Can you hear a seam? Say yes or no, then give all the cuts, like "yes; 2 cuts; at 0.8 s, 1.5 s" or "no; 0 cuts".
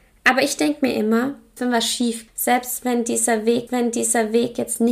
yes; 3 cuts; at 1.6 s, 2.3 s, 3.7 s